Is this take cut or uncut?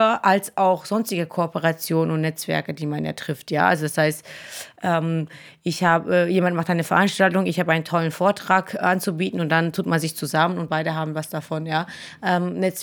uncut